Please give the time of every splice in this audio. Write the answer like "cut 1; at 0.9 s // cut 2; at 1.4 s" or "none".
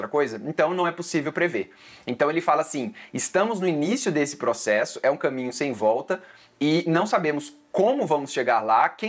none